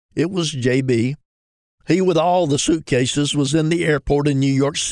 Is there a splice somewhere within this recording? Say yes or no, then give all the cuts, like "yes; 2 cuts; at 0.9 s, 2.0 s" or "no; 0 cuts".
no; 0 cuts